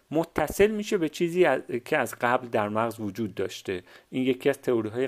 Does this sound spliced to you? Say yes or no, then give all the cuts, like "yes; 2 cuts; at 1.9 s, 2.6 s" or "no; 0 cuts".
no; 0 cuts